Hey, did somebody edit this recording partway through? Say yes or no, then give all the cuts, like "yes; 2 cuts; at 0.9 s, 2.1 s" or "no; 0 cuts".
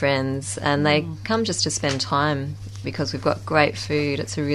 yes; 1 cut; at 2.8 s